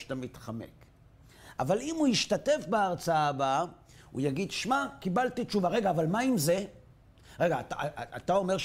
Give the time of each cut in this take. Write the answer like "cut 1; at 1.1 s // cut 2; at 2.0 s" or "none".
none